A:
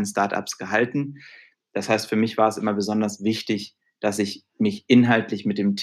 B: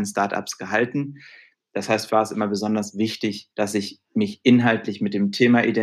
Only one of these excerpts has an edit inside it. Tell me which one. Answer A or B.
B